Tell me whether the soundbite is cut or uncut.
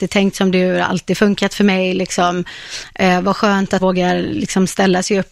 cut